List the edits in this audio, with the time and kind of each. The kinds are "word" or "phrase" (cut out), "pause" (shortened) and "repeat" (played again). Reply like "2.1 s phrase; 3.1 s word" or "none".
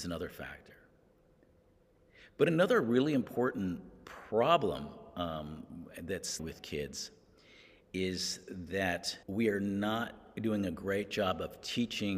6.4 s phrase; 9.2 s pause